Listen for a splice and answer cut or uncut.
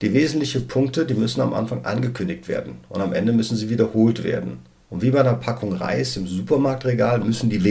uncut